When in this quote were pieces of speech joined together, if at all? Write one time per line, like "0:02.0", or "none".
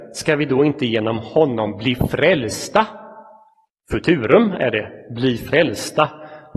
none